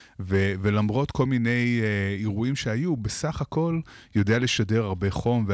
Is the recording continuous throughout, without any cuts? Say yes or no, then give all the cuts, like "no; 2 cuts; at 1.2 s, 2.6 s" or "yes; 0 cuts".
yes; 0 cuts